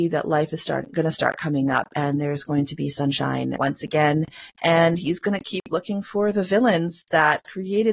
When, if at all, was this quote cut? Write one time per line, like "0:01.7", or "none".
0:03.6